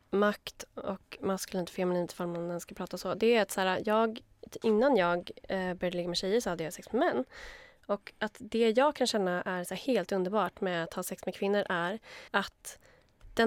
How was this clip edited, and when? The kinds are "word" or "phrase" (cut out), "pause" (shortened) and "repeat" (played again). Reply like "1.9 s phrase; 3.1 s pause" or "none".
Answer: 12.3 s pause